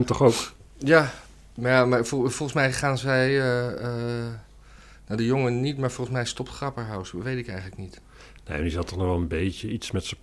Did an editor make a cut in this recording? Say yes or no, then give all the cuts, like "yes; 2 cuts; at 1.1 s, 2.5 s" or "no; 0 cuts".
no; 0 cuts